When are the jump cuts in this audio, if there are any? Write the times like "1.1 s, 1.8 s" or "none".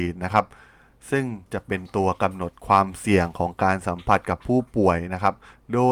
1.5 s